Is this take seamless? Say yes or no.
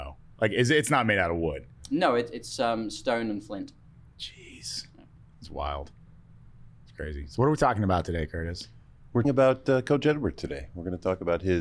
no